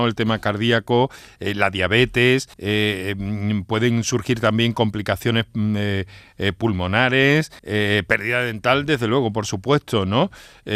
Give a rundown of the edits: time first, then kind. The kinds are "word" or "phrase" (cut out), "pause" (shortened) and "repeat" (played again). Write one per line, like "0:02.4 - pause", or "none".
0:02.5 - pause
0:07.6 - pause